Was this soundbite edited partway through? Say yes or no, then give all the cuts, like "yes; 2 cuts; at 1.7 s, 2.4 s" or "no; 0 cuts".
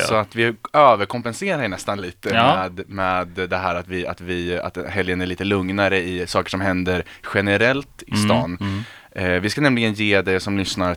no; 0 cuts